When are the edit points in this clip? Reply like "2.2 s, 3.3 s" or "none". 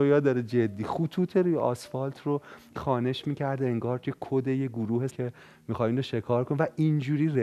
2.8 s, 5.1 s

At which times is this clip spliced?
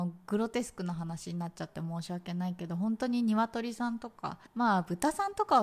4.5 s

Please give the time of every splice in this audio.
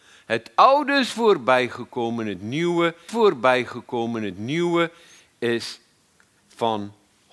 3.1 s

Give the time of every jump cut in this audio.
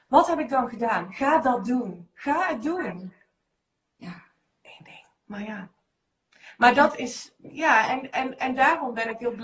none

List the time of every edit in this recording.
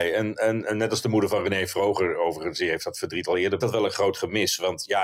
3.6 s

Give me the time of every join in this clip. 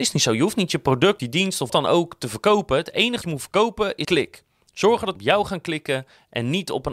1.2 s, 1.7 s, 3.2 s, 4.0 s, 5.2 s

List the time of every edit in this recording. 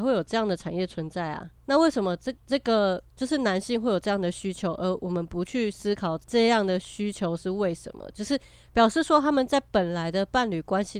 1.6 s, 2.4 s, 3.1 s, 6.2 s

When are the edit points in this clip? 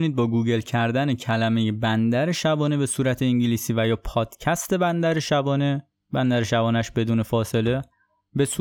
none

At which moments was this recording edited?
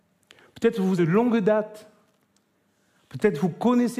1.0 s

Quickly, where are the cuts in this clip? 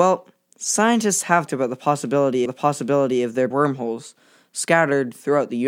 1.5 s, 2.5 s, 3.5 s

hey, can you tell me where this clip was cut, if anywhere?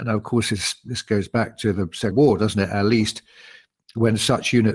2.1 s

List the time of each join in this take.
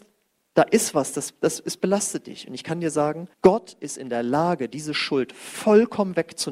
3.3 s

